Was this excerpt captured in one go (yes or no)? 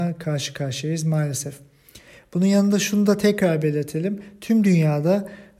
yes